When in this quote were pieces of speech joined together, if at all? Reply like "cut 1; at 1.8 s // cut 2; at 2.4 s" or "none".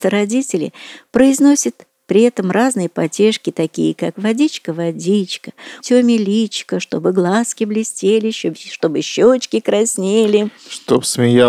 cut 1; at 5.8 s